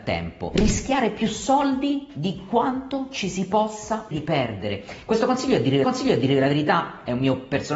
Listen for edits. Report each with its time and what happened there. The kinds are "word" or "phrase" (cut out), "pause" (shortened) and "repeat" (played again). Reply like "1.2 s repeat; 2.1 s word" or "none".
4.1 s word; 5.8 s repeat